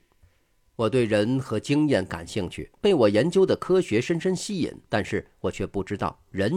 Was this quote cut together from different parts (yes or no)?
yes